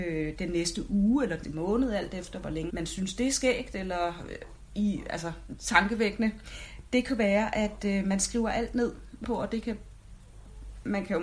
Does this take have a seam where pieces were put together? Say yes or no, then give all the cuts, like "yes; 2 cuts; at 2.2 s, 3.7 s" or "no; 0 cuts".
yes; 3 cuts; at 1.4 s, 2.7 s, 9.2 s